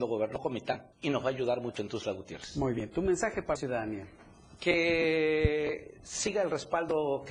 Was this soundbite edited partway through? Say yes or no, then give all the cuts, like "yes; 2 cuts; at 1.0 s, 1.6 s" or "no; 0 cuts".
yes; 2 cuts; at 0.9 s, 3.6 s